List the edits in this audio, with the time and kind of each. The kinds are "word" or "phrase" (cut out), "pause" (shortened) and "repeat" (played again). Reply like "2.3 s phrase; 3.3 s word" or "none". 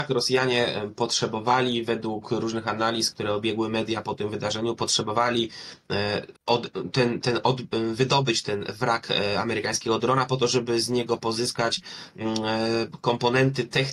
3.1 s word; 6.4 s pause; 7.2 s word

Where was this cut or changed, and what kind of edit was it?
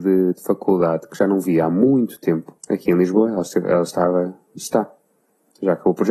2.6 s pause; 4.5 s pause

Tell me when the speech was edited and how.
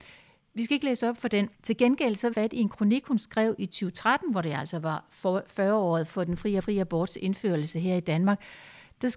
1.5 s pause; 2.3 s phrase; 6.1 s word; 6.6 s repeat

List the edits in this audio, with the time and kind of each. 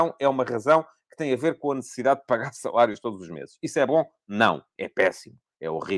none

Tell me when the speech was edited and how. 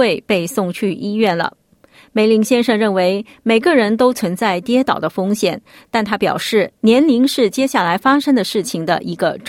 none

